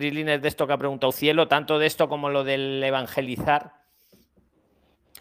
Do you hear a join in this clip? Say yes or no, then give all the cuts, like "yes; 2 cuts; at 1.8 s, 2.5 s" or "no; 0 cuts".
no; 0 cuts